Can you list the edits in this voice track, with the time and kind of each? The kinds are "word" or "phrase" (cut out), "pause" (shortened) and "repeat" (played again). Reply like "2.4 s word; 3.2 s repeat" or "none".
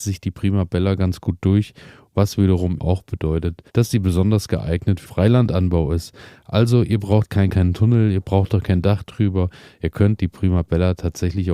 2.8 s word; 3.7 s pause; 5.0 s word; 7.5 s phrase